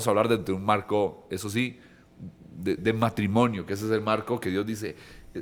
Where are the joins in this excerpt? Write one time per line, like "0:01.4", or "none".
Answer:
0:02.8